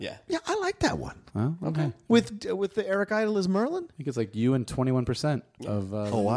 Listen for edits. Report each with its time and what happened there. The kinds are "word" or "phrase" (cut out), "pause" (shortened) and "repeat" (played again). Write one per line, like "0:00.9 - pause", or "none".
none